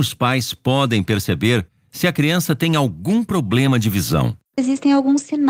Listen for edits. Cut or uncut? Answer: uncut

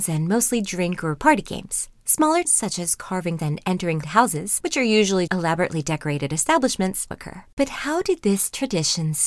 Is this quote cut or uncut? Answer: cut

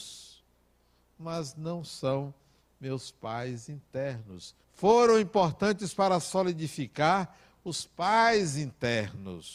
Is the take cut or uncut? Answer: cut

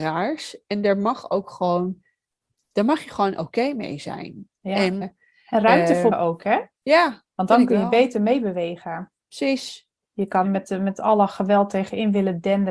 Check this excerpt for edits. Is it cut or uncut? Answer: cut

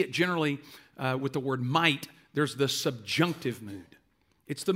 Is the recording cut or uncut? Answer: uncut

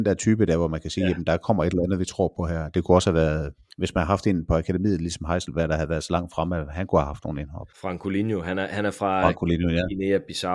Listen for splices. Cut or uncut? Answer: cut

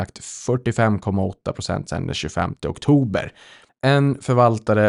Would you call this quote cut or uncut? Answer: uncut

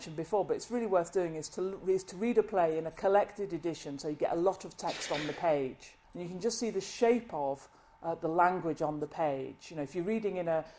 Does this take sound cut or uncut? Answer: cut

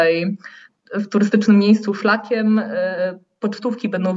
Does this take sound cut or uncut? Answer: uncut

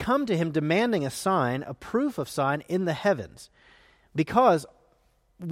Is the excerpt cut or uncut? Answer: uncut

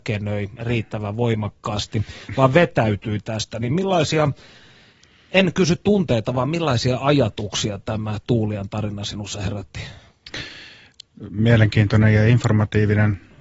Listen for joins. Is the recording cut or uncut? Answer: uncut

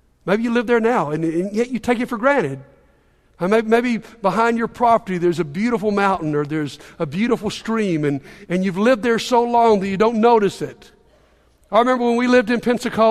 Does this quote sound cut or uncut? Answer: uncut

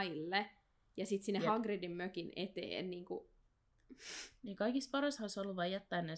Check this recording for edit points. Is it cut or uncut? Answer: uncut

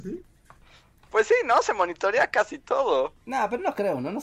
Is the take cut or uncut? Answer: cut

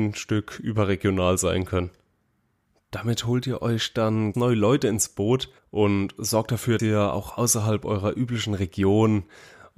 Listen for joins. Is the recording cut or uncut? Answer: cut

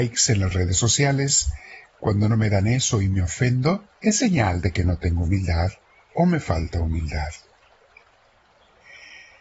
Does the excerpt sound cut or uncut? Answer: cut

